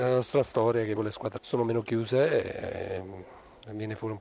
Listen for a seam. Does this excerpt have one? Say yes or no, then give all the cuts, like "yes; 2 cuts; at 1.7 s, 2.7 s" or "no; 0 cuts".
yes; 2 cuts; at 1.0 s, 1.4 s